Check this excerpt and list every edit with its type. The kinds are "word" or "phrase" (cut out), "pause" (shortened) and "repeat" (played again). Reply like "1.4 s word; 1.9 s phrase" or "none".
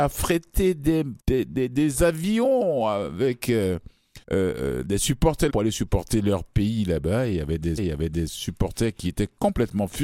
1.2 s pause; 4.2 s pause; 5.5 s word; 7.8 s repeat